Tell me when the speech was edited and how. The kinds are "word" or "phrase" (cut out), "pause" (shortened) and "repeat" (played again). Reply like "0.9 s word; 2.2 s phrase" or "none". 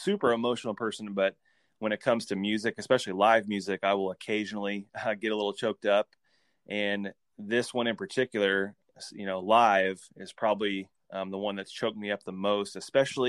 none